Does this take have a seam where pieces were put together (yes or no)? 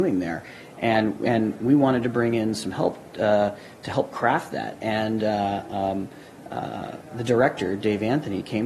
no